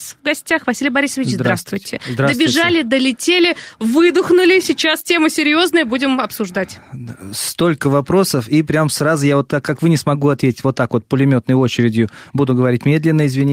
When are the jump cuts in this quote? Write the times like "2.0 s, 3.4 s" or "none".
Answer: none